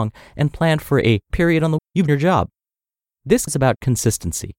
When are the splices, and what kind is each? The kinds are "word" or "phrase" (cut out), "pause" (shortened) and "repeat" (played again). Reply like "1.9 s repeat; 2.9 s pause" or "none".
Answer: 1.3 s word; 1.8 s word; 2.1 s word; 3.5 s word